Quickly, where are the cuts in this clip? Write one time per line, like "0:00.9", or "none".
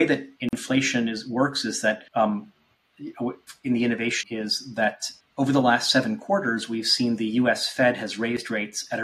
0:02.1
0:04.2
0:05.2